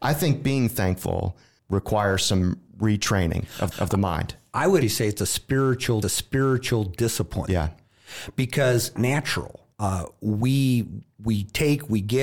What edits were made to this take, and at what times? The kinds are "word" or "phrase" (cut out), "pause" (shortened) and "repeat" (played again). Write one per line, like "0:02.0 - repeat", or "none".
0:01.6 - pause
0:02.7 - pause
0:03.7 - repeat
0:04.8 - word
0:06.0 - repeat
0:09.0 - phrase
0:09.7 - pause